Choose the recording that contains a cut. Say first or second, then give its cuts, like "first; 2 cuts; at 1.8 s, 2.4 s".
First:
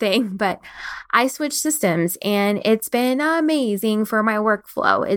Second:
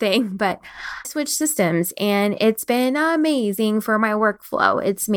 second; 1 cut; at 1.0 s